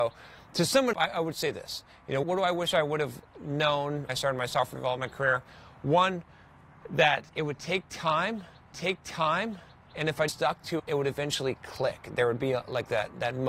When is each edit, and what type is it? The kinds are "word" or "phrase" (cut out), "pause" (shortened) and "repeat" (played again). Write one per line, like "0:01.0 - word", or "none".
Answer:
0:00.9 - word
0:02.2 - word
0:04.1 - word
0:07.3 - pause
0:08.7 - repeat
0:10.3 - word
0:10.8 - word

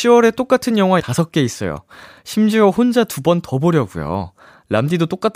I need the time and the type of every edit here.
0:01.0 - word

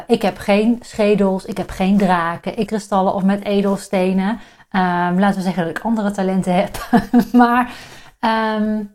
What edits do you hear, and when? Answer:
0:02.7 - phrase

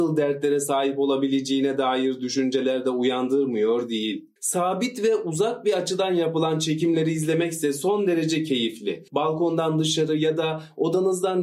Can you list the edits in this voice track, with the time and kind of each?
0:04.4 - pause
0:09.1 - pause

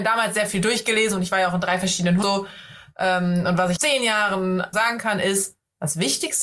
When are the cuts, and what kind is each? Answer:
0:02.2 - phrase
0:03.8 - word
0:04.7 - word

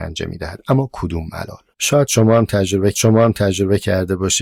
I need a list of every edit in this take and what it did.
0:01.7 - pause
0:02.9 - repeat

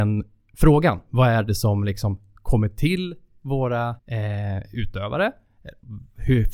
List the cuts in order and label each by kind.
0:04.0 - pause

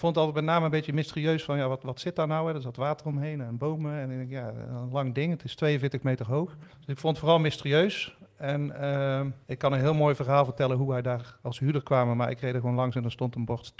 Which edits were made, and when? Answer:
0:06.7 - pause
0:09.4 - pause

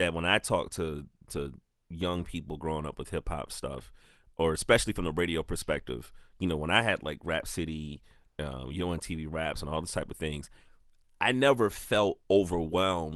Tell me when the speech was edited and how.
none

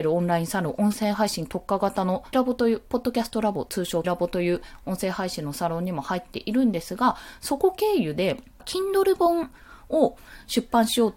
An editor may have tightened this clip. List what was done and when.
0:02.3 - word
0:04.0 - word
0:08.6 - word

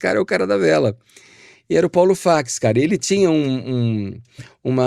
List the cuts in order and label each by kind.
none

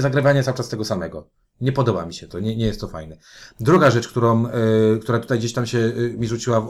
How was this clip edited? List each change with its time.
none

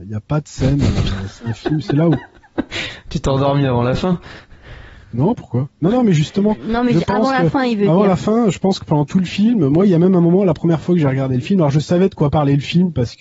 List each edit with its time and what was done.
0:05.0 - pause

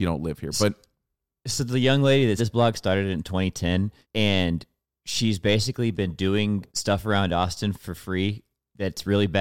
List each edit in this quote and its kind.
0:02.4 - word
0:04.0 - pause
0:06.7 - pause

